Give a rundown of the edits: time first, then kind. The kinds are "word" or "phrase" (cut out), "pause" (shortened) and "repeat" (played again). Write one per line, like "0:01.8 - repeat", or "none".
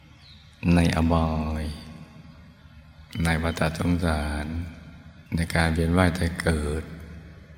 0:05.3 - pause